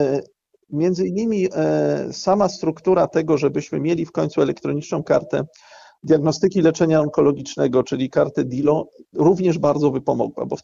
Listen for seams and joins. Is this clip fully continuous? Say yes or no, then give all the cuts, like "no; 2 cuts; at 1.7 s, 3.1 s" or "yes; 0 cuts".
yes; 0 cuts